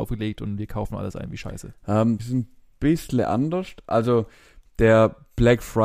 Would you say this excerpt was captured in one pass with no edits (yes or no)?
no